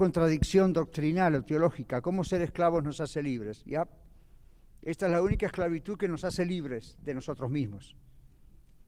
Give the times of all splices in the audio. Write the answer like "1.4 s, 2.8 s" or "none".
none